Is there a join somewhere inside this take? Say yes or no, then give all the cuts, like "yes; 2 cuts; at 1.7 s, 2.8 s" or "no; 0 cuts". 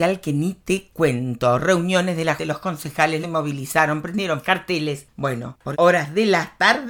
yes; 4 cuts; at 2.4 s, 3.2 s, 4.4 s, 5.7 s